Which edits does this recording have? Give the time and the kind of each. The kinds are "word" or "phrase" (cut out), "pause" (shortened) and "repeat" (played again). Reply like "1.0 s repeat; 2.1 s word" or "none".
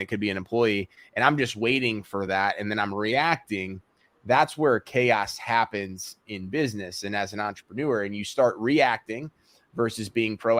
none

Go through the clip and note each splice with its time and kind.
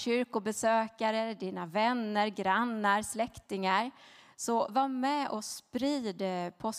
none

